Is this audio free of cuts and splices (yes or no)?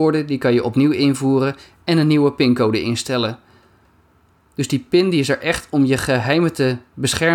yes